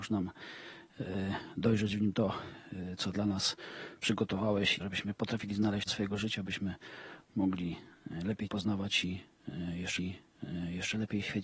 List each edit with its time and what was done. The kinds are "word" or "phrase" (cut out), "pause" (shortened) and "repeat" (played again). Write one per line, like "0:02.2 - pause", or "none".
0:04.8 - word
0:05.9 - phrase
0:08.5 - word
0:10.0 - repeat